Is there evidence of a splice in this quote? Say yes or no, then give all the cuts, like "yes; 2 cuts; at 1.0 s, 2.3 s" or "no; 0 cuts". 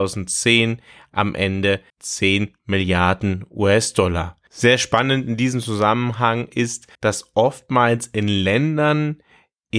yes; 2 cuts; at 1.9 s, 6.9 s